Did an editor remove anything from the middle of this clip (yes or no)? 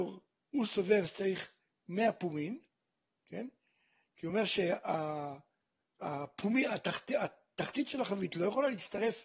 no